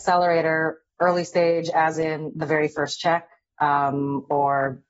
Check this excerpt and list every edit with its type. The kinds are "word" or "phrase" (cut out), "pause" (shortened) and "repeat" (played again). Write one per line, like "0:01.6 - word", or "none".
none